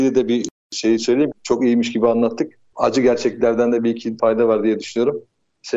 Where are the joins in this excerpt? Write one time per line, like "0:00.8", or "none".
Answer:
0:01.3
0:04.2